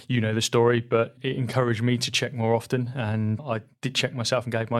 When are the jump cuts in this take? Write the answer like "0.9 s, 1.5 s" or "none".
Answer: 1.2 s, 3.4 s